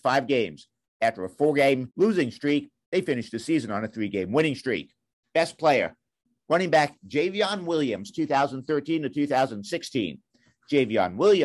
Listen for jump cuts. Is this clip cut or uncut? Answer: uncut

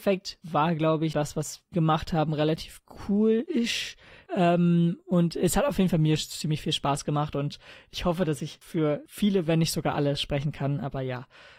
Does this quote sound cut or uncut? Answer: cut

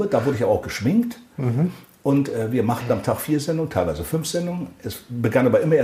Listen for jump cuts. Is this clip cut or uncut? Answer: uncut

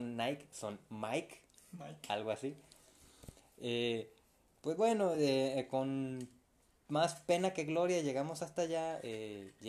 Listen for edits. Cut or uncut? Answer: uncut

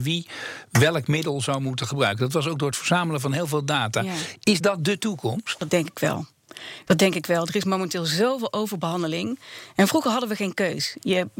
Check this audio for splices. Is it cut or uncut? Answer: uncut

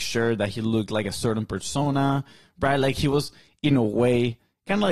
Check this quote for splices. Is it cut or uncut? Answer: uncut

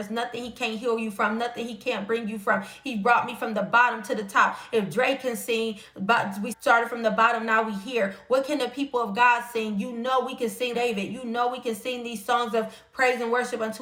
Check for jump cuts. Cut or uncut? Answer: cut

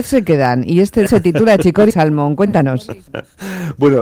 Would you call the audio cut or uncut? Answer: cut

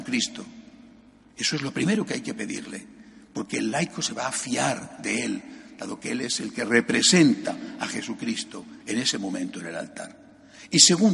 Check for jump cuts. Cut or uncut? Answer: uncut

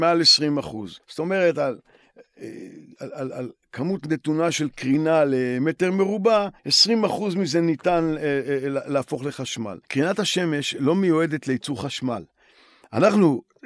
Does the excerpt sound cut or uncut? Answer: cut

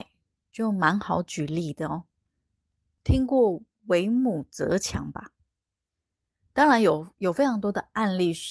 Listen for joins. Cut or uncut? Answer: uncut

